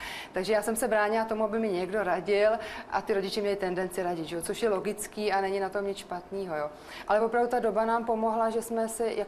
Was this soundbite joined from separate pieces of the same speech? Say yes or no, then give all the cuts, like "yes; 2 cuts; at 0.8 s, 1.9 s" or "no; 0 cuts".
no; 0 cuts